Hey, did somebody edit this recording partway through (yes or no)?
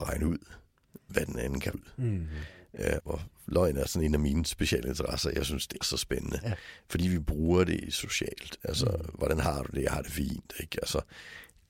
yes